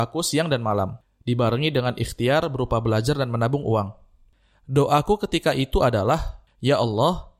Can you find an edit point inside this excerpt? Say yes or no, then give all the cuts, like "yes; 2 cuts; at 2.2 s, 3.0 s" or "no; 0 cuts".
no; 0 cuts